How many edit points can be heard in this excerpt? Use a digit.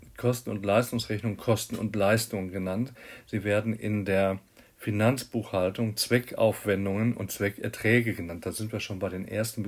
0